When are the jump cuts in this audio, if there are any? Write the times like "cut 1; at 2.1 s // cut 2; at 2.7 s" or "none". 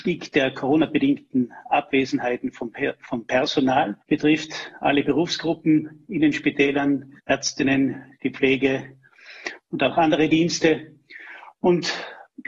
cut 1; at 4.0 s // cut 2; at 7.2 s